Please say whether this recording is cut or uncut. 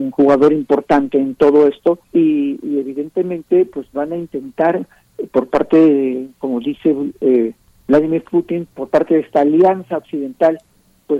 cut